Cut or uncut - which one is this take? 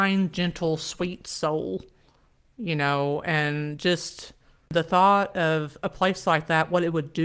uncut